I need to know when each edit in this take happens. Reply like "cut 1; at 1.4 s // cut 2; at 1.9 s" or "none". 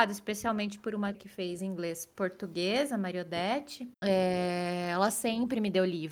cut 1; at 1.1 s // cut 2; at 1.6 s // cut 3; at 3.9 s